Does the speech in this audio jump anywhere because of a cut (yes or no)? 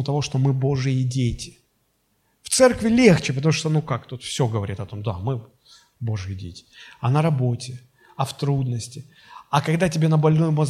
no